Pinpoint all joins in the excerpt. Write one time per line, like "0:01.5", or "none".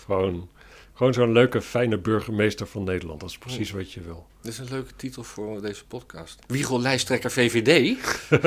0:06.4